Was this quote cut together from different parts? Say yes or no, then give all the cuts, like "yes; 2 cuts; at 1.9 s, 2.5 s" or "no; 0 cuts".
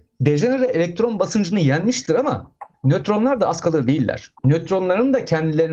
yes; 2 cuts; at 2.7 s, 4.4 s